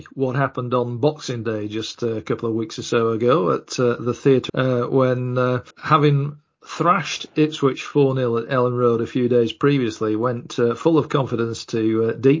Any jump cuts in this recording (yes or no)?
yes